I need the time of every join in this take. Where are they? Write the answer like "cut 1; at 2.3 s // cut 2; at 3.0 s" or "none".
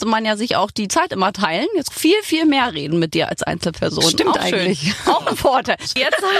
cut 1; at 1.9 s